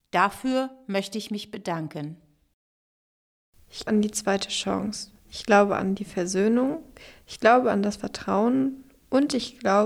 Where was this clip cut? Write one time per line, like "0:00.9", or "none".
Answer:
0:03.9